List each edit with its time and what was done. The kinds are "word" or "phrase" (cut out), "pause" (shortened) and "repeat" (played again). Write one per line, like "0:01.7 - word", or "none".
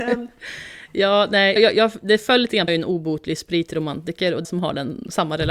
0:01.6 - word
0:02.7 - phrase
0:04.4 - phrase